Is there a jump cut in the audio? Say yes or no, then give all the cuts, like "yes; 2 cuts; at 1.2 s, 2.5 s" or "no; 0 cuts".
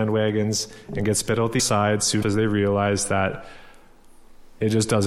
yes; 2 cuts; at 1.6 s, 2.2 s